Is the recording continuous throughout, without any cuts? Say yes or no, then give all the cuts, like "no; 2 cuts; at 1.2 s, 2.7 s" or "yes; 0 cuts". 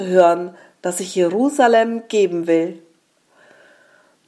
yes; 0 cuts